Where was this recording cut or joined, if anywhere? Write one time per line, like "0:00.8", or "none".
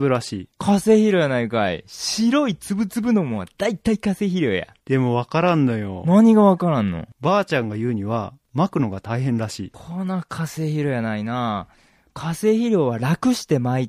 none